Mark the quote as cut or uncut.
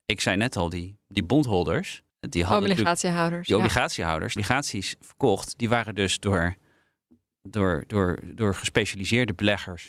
cut